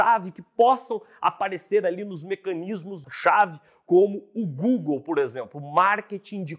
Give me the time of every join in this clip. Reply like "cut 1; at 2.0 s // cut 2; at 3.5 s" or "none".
none

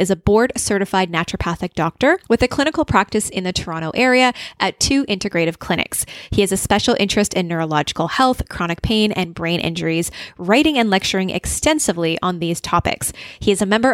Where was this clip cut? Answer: cut 1; at 2.2 s

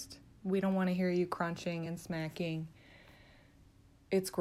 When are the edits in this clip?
none

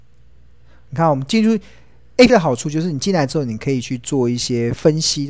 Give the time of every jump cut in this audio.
cut 1; at 2.3 s

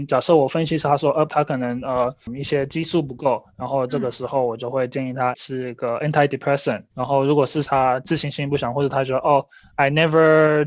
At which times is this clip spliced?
cut 1; at 1.3 s // cut 2; at 5.3 s // cut 3; at 6.9 s // cut 4; at 7.6 s

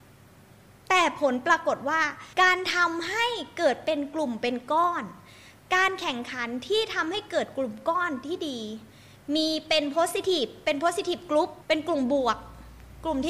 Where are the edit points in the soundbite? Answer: cut 1; at 2.3 s // cut 2; at 11.6 s

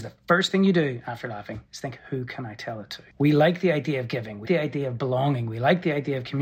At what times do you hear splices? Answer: cut 1; at 3.1 s // cut 2; at 4.5 s

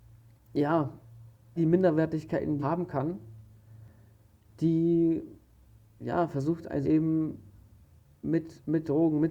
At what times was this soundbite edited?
cut 1; at 1.6 s // cut 2; at 2.6 s // cut 3; at 6.8 s

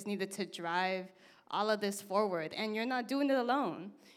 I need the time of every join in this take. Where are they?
none

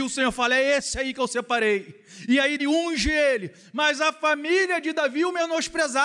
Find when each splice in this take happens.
cut 1; at 2.6 s

